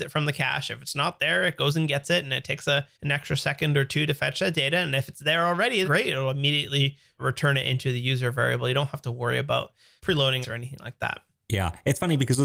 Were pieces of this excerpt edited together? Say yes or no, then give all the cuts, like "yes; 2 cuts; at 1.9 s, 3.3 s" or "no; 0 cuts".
yes; 3 cuts; at 2.9 s, 5.8 s, 10.4 s